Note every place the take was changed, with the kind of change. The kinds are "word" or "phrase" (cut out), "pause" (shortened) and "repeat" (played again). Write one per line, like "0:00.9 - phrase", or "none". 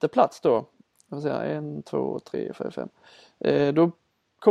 none